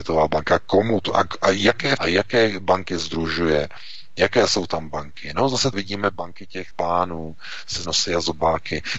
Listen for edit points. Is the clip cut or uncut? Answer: cut